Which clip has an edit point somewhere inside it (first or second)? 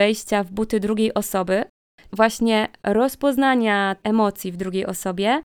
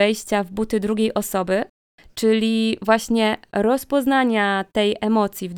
first